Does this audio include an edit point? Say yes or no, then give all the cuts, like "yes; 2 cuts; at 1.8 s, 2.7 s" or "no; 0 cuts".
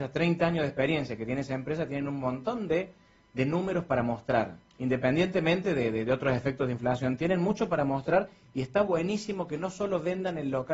no; 0 cuts